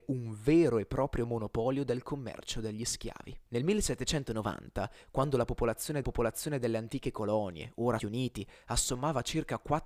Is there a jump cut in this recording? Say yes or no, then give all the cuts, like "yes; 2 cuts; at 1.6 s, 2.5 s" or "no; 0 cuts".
yes; 3 cuts; at 3.5 s, 6.0 s, 8.0 s